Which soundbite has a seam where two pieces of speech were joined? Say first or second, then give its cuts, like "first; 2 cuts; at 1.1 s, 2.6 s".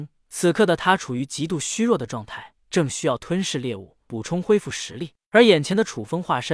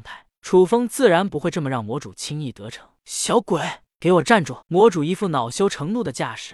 second; 1 cut; at 4.6 s